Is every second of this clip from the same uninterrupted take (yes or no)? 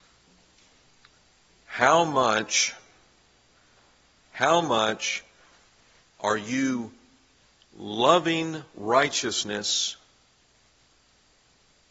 yes